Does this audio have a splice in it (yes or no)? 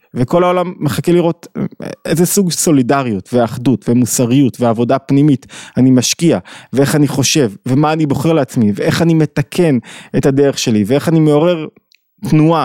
no